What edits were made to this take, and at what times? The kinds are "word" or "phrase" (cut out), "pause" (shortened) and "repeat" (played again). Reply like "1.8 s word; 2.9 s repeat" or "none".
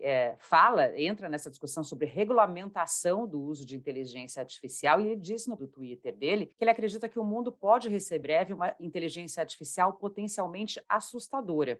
5.6 s word; 6.5 s pause; 8.2 s word